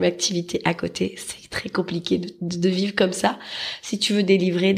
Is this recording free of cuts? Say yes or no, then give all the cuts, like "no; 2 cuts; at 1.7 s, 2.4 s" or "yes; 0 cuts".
yes; 0 cuts